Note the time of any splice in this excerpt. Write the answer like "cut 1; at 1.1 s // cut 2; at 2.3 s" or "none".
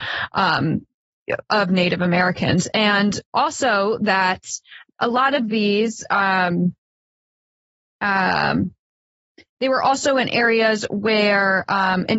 none

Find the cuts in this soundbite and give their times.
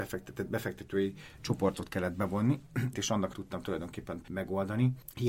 cut 1; at 1.4 s // cut 2; at 2.9 s // cut 3; at 3.3 s // cut 4; at 4.2 s

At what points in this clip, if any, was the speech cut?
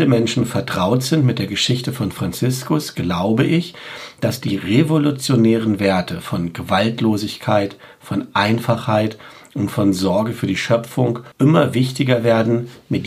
cut 1; at 11.3 s

